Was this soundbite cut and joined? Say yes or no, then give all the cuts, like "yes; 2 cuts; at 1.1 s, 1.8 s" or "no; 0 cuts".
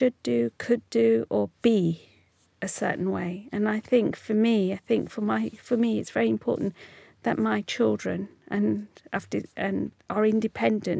no; 0 cuts